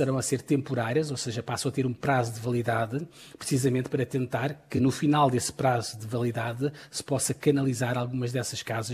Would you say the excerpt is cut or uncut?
uncut